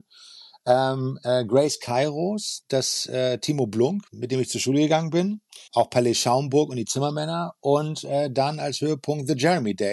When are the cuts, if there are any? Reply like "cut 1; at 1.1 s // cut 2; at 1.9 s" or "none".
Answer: cut 1; at 4.1 s // cut 2; at 5.7 s